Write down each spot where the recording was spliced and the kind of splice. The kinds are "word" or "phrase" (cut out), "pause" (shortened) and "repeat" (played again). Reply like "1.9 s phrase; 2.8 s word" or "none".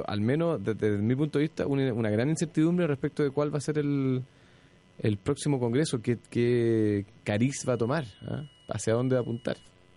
none